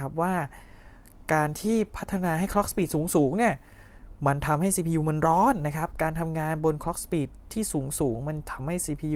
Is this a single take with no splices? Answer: yes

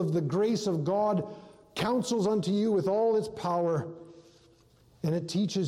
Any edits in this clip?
no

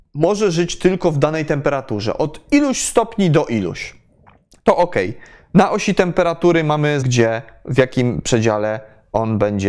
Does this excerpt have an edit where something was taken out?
yes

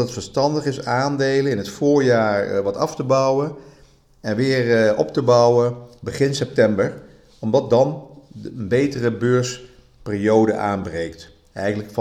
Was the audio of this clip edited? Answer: no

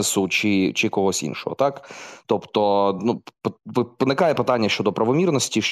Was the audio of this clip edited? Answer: no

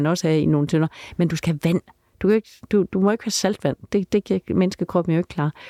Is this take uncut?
yes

